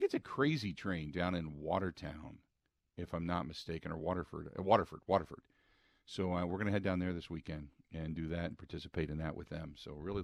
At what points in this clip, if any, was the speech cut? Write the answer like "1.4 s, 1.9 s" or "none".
none